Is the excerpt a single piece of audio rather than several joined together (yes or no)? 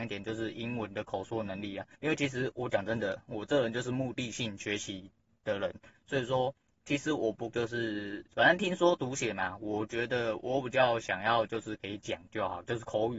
no